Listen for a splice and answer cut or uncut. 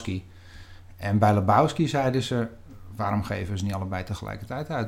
uncut